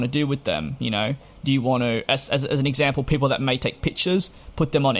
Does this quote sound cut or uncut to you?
uncut